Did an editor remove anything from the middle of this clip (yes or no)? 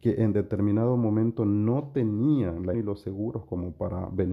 yes